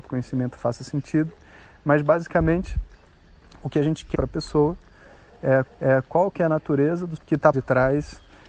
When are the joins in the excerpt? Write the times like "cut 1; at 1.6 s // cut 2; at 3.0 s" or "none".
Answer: cut 1; at 4.1 s // cut 2; at 5.6 s // cut 3; at 7.2 s // cut 4; at 7.5 s